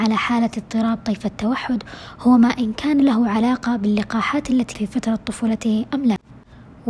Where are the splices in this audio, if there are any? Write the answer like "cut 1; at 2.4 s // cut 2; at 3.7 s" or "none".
cut 1; at 4.7 s